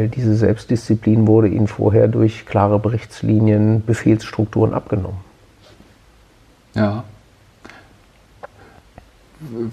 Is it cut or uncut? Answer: uncut